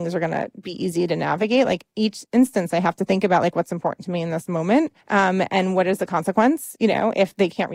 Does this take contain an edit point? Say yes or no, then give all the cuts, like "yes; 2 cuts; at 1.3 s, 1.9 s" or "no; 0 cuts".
yes; 1 cut; at 5.0 s